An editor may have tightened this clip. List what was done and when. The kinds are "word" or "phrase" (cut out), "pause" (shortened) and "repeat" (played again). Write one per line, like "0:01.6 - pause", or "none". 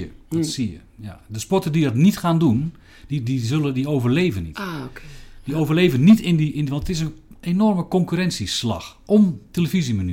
none